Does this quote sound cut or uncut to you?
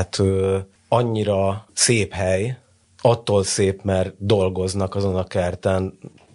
cut